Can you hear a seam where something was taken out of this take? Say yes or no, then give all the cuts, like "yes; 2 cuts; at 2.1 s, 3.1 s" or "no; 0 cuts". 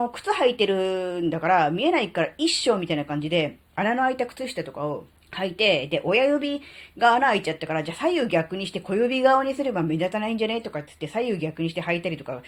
yes; 2 cuts; at 3.7 s, 5.2 s